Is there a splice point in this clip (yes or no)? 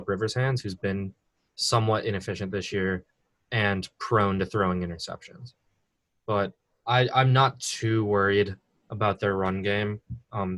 no